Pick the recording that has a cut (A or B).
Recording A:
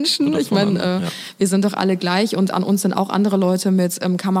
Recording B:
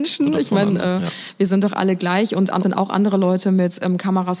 B